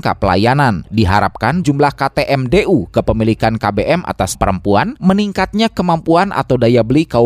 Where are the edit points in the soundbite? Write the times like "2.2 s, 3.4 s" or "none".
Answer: 1.6 s, 4.4 s